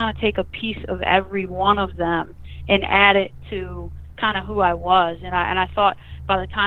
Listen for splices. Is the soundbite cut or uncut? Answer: uncut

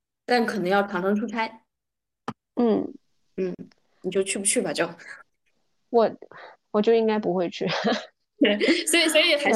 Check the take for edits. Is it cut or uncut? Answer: uncut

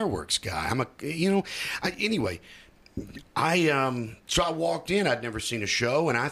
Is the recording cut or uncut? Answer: cut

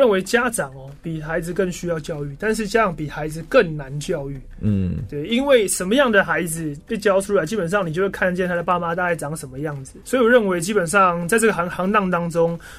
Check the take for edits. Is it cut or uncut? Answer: cut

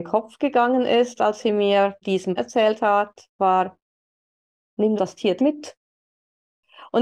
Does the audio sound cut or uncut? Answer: cut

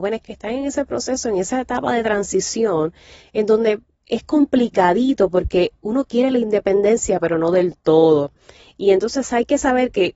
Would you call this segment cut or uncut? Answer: uncut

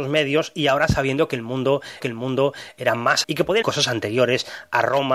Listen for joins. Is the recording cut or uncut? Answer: cut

